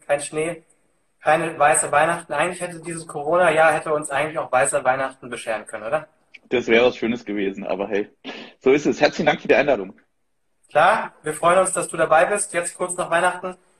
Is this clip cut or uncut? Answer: uncut